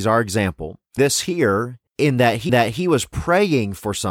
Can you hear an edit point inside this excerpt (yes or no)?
yes